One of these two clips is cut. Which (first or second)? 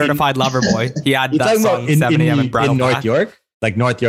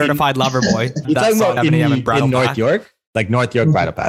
second